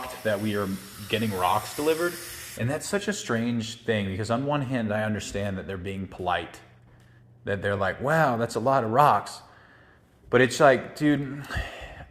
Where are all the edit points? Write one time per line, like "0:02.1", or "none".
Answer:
none